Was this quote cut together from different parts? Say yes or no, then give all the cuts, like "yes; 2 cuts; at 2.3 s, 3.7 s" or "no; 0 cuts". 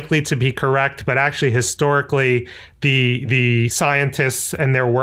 no; 0 cuts